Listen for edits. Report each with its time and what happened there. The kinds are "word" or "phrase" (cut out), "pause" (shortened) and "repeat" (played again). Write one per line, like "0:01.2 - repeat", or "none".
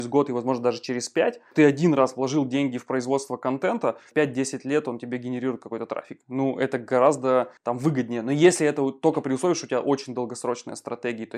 0:07.6 - pause